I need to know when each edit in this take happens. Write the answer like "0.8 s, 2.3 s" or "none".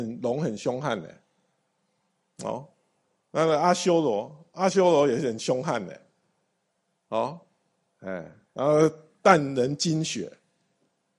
none